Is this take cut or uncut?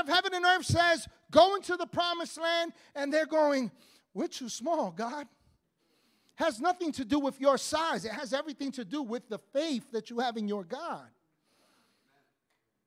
uncut